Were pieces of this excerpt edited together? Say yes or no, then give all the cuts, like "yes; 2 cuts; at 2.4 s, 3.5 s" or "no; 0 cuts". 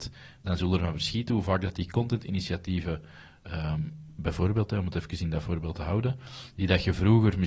no; 0 cuts